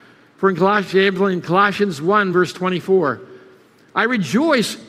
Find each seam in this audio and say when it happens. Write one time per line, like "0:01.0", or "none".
none